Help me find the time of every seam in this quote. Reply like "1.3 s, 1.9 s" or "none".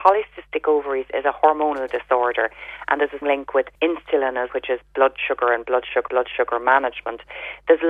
3.2 s, 3.7 s, 4.5 s, 6.1 s